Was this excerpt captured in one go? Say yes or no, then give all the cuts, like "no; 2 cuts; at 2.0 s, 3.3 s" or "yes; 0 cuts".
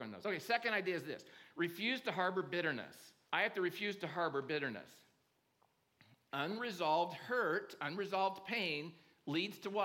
no; 2 cuts; at 3.3 s, 5.3 s